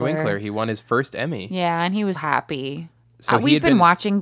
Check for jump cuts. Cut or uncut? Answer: cut